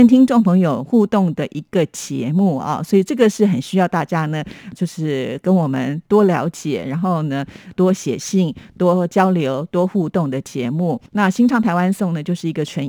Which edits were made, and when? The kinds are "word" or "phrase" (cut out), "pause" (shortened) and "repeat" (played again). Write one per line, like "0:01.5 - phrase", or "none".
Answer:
0:04.7 - word
0:07.7 - word
0:11.1 - pause